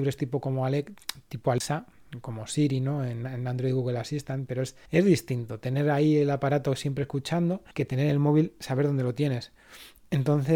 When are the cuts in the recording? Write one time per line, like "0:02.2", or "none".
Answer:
0:04.9
0:07.7